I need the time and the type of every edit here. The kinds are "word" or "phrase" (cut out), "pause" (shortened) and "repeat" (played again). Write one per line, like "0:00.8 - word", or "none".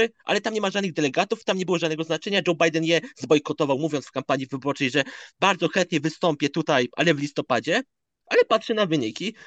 none

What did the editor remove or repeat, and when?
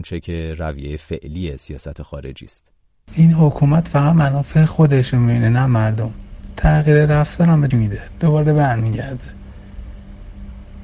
0:07.7 - word

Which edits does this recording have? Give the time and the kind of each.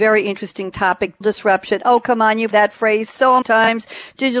0:01.2 - word
0:02.5 - word
0:03.4 - word

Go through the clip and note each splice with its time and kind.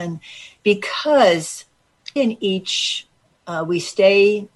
0:02.2 - phrase

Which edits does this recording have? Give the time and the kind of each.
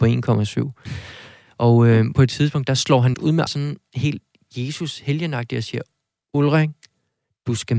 0:03.1 - word
0:03.5 - word

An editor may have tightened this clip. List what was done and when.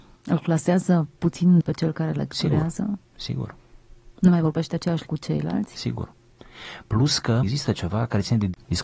0:01.6 - word
0:05.0 - word
0:07.4 - word

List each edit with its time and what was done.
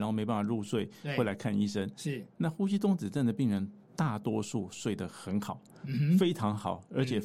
none

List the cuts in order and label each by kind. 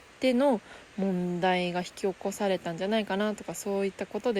none

